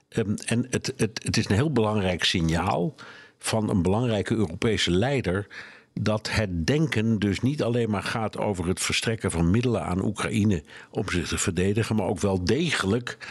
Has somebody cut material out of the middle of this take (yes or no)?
no